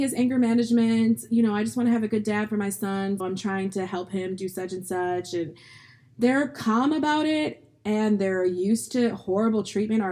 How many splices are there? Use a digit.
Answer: 1